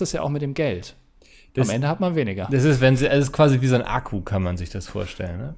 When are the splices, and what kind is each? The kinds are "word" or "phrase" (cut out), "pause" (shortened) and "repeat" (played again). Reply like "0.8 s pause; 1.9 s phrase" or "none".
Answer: none